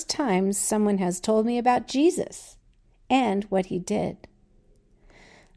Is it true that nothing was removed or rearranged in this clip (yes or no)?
yes